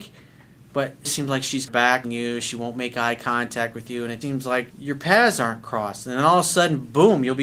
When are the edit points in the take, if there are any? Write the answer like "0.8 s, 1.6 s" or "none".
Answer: 1.0 s, 1.7 s, 2.0 s, 4.2 s, 4.7 s